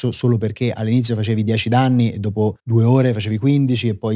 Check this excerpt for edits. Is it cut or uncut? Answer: cut